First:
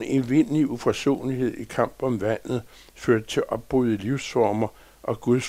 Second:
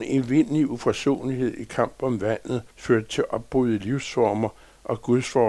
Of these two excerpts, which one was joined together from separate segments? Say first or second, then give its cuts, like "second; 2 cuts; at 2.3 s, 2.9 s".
second; 1 cut; at 2.7 s